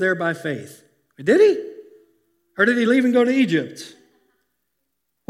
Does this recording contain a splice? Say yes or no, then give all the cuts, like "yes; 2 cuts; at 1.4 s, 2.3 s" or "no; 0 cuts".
no; 0 cuts